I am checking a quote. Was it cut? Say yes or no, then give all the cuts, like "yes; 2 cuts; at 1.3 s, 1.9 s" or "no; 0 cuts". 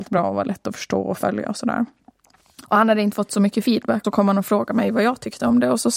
yes; 2 cuts; at 2.6 s, 4.0 s